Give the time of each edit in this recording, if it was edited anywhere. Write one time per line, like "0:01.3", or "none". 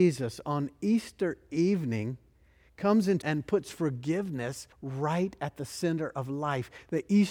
0:03.2
0:04.7

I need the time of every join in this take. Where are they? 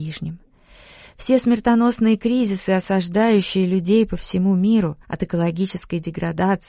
0:05.0

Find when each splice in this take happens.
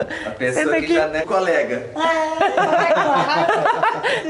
0:01.2

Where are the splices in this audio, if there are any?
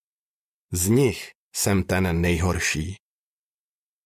none

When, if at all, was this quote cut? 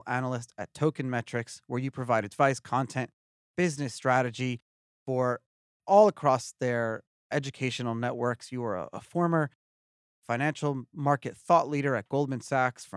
none

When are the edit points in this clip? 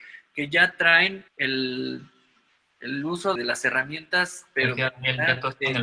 0:01.3
0:03.4

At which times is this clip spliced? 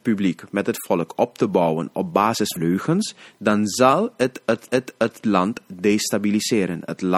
0:02.6
0:04.7

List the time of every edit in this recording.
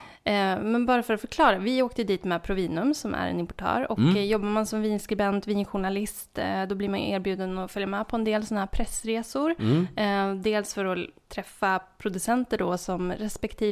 none

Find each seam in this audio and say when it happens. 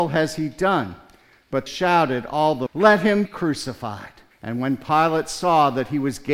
0:01.7
0:02.7
0:03.3
0:04.3

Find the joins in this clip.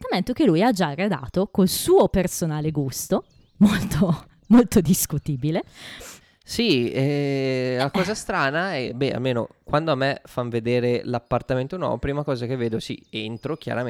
0:06.2

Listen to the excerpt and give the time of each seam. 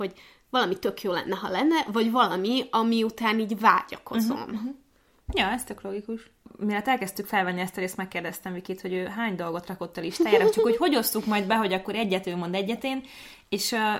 none

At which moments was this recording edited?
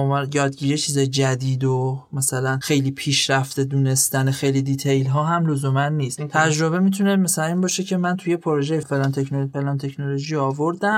0:08.8

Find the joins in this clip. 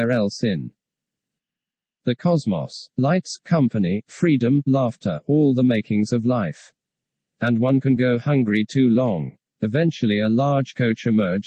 none

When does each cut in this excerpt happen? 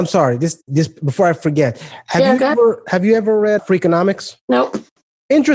0:03.6
0:04.4

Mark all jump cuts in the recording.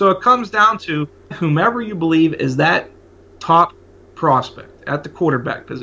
0:01.3

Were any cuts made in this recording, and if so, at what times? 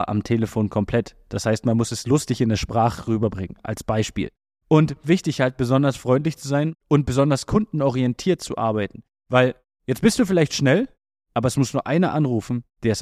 0:05.0

